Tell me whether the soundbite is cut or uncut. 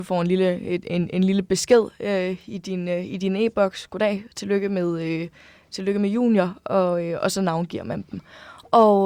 uncut